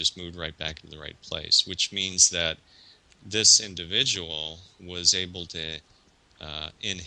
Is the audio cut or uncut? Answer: uncut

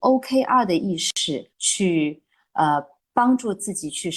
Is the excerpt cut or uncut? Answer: cut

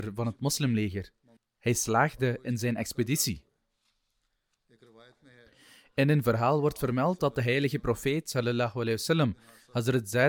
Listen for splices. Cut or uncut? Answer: cut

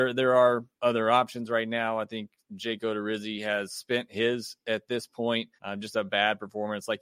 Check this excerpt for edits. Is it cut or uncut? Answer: cut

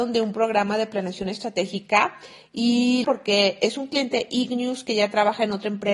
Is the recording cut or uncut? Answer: cut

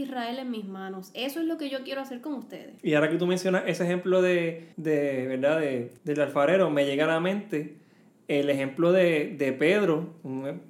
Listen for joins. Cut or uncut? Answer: cut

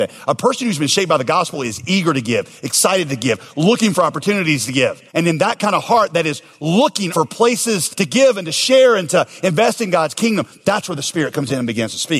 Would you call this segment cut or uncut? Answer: cut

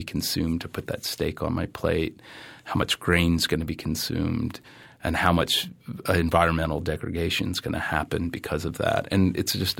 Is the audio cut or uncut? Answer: uncut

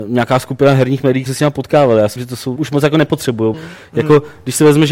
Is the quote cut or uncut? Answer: cut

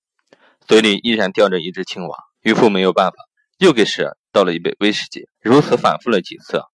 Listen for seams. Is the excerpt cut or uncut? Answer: cut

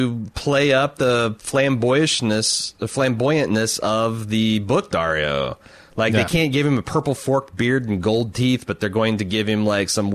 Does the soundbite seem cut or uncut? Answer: uncut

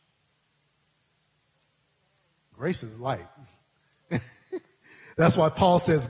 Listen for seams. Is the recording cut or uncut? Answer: uncut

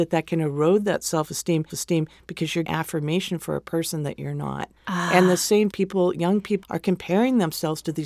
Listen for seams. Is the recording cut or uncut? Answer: cut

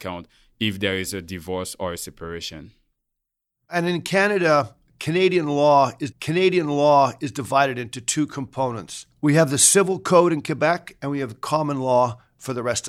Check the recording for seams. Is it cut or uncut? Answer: cut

